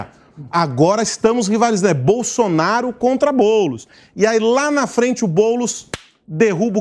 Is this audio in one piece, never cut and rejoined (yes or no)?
yes